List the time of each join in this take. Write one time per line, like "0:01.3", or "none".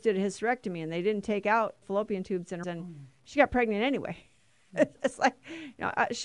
0:01.8
0:02.6
0:05.0